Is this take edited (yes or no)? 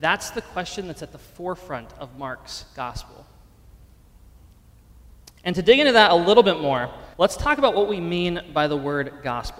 yes